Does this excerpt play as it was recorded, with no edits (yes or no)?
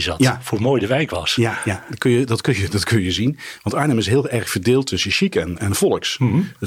no